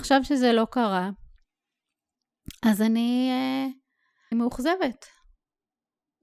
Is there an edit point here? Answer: yes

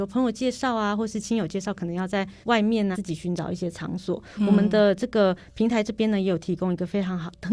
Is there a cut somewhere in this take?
yes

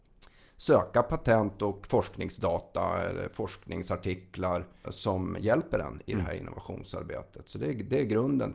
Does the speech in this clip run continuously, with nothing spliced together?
no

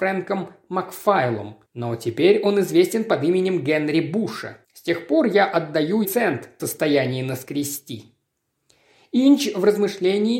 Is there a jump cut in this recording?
yes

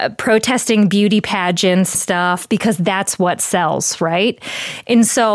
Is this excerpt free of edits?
no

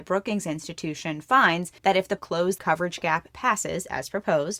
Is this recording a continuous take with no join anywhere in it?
no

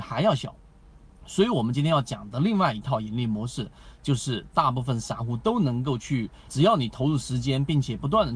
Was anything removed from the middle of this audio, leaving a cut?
yes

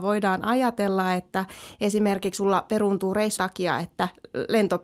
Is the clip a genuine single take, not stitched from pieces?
no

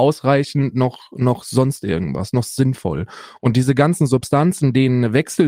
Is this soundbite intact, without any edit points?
yes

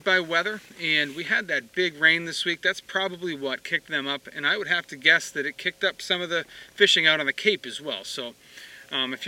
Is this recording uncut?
yes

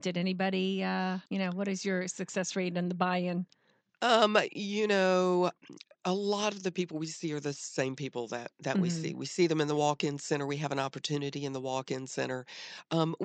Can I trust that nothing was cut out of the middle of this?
no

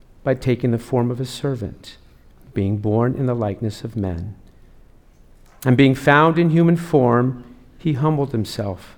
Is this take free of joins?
yes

